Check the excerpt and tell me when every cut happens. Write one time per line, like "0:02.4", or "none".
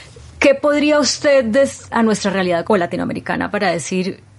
0:01.9
0:02.6